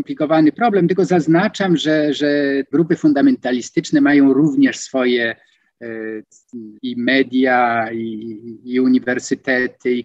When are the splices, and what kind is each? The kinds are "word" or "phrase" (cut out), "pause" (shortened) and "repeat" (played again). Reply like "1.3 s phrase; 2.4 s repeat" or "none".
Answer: 2.7 s word; 6.8 s pause